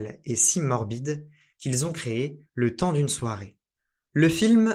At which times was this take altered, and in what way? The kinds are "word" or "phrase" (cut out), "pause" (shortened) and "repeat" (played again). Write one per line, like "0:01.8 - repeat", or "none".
none